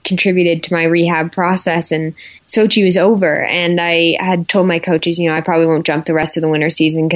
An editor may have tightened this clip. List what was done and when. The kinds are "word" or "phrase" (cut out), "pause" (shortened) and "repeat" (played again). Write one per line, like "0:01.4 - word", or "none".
0:02.4 - pause